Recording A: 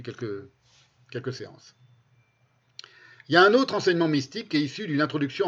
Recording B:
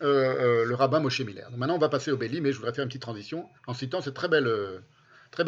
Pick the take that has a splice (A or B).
B